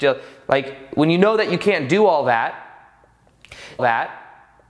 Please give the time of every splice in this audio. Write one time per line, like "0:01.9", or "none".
0:03.8